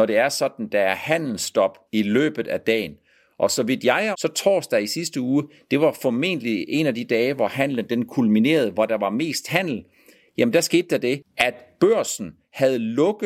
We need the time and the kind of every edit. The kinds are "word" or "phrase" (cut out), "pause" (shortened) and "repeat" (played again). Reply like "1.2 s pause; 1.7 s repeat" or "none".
1.9 s pause; 4.1 s word